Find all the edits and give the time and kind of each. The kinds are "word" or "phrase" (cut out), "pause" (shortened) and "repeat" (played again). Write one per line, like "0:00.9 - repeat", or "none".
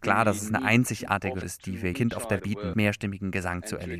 0:01.4 - word
0:01.9 - word
0:02.4 - word
0:02.7 - phrase